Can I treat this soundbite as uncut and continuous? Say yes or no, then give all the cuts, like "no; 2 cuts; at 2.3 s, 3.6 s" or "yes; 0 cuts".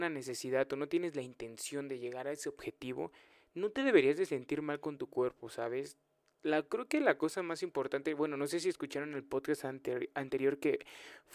yes; 0 cuts